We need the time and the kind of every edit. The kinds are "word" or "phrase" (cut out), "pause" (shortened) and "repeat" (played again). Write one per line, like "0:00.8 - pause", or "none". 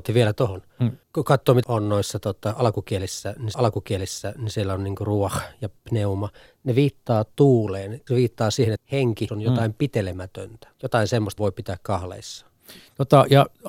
0:01.0 - pause
0:01.6 - word
0:03.5 - repeat
0:05.8 - pause
0:08.1 - phrase
0:08.8 - word
0:09.3 - word
0:10.7 - pause
0:11.4 - phrase